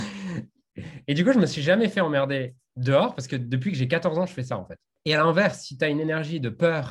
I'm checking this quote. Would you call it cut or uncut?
uncut